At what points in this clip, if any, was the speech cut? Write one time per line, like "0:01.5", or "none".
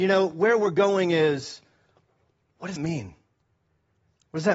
0:02.8